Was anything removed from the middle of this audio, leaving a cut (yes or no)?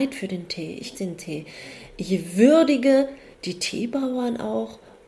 yes